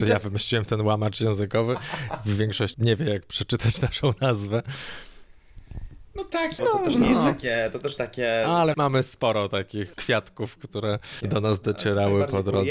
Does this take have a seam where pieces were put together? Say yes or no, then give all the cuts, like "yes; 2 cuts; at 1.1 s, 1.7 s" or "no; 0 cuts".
yes; 6 cuts; at 2.7 s, 6.6 s, 8.0 s, 8.7 s, 9.9 s, 11.2 s